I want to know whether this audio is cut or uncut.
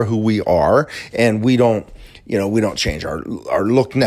uncut